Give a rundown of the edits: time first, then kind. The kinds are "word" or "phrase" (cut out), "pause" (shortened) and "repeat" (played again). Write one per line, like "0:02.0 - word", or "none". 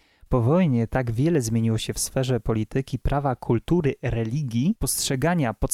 none